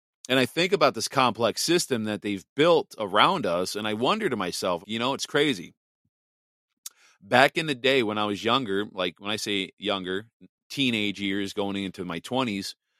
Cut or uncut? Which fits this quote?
cut